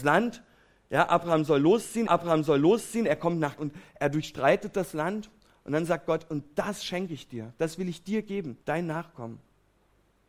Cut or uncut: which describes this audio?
cut